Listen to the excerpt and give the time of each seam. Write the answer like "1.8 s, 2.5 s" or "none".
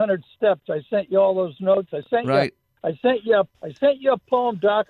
3.5 s